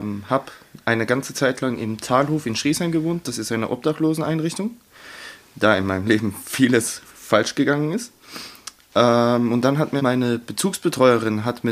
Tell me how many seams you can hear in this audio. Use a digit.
1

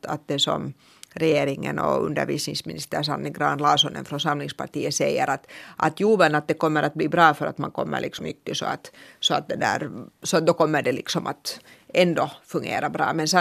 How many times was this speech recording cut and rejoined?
1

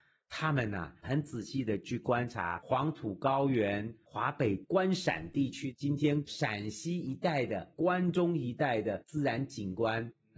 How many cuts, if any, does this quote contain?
1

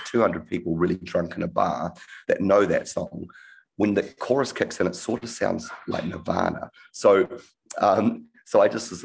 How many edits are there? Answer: 0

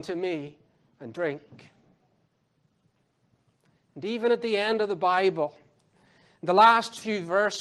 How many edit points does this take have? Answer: 0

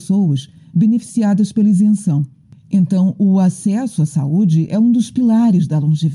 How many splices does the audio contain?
0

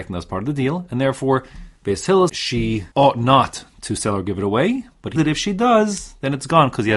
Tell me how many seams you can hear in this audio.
4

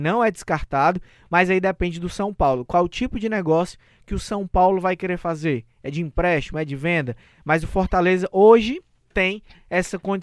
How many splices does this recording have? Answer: 0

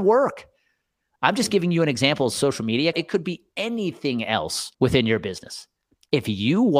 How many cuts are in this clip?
2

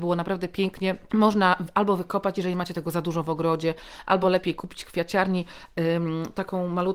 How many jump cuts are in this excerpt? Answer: 0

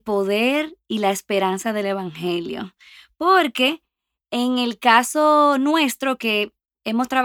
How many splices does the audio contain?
0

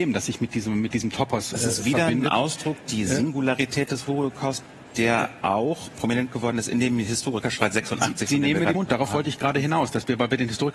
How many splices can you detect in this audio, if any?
1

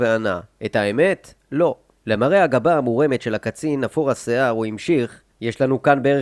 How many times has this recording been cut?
0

